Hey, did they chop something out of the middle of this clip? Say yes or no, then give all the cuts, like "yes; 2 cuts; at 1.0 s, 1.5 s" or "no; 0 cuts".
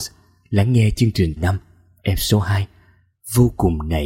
yes; 1 cut; at 1.4 s